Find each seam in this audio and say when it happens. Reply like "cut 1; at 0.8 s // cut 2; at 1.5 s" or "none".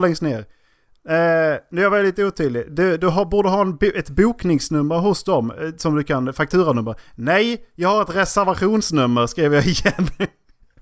none